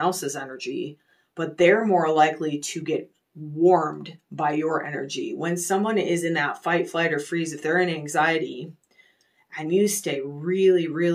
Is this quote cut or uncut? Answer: uncut